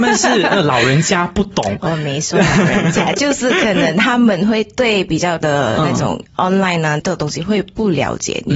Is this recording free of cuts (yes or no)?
no